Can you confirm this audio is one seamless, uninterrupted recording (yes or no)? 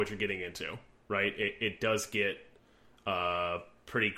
yes